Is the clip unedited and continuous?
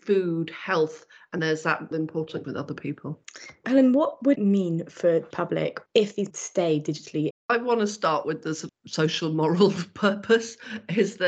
no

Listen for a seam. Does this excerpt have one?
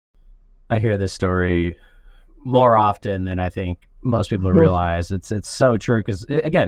no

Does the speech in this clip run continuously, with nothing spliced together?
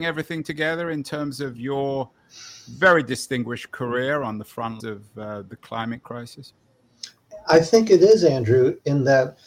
no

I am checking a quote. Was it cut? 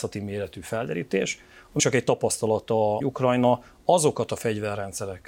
yes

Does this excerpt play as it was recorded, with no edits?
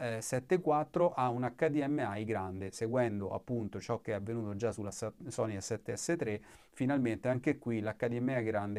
yes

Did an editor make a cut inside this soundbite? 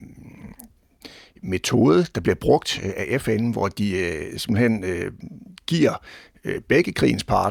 no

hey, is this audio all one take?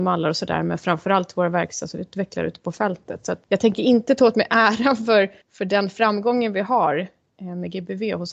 no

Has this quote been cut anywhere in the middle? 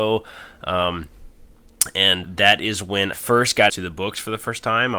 yes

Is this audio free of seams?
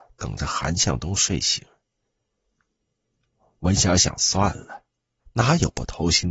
yes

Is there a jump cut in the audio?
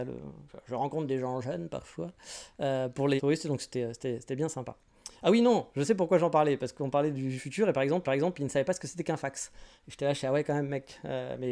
yes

